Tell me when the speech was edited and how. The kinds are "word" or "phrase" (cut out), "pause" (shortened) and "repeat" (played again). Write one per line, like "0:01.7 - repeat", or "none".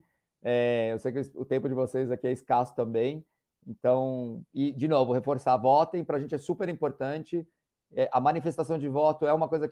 none